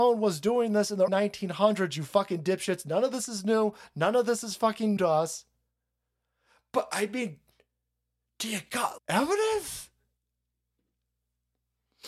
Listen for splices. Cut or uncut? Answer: cut